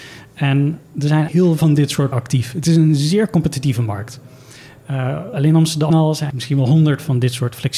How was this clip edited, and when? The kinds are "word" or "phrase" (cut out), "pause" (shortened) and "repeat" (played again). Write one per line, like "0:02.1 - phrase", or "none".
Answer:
0:01.3 - word
0:01.6 - word
0:02.1 - word
0:05.3 - word
0:05.9 - word
0:06.3 - word

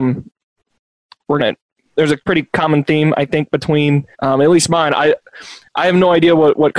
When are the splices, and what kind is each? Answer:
0:01.4 - phrase
0:02.2 - pause
0:04.1 - pause

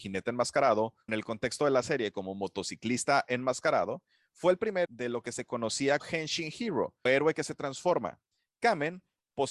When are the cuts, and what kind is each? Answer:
0:01.1 - word
0:04.9 - word
0:06.0 - word
0:07.1 - word

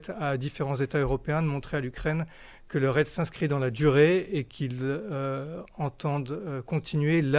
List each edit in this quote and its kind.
none

